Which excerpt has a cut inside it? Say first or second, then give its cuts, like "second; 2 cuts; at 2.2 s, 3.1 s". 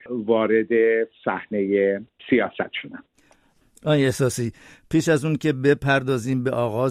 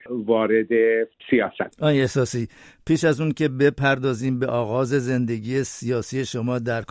second; 2 cuts; at 1.1 s, 1.7 s